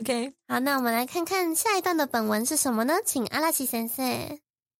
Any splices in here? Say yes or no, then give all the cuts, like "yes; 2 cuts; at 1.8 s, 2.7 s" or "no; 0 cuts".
no; 0 cuts